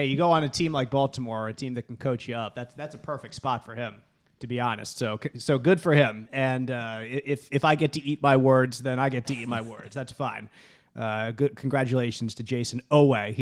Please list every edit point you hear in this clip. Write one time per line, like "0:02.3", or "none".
none